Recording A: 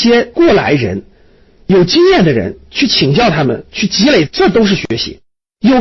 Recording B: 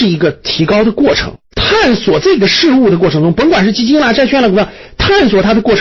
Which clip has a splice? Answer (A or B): B